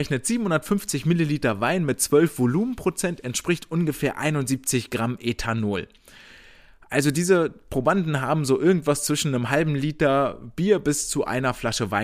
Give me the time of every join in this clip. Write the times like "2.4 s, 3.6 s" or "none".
none